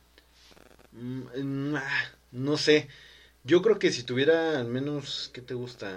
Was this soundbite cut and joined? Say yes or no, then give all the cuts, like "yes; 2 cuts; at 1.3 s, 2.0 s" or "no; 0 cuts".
no; 0 cuts